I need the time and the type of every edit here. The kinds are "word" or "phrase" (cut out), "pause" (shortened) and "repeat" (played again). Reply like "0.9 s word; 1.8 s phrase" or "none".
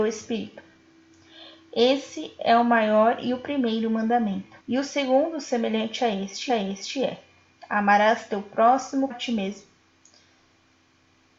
4.6 s pause; 6.5 s repeat; 9.1 s word